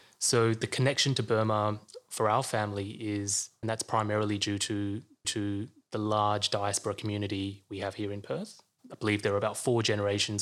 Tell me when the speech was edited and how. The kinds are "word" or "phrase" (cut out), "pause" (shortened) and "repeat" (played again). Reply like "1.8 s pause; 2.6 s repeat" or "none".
3.6 s phrase; 5.2 s repeat

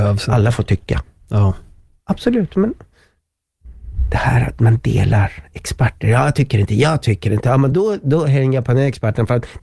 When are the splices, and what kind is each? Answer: none

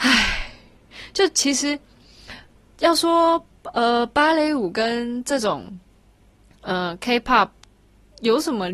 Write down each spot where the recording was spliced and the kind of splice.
none

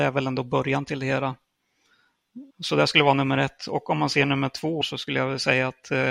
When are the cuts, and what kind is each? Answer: 2.5 s pause; 4.8 s phrase

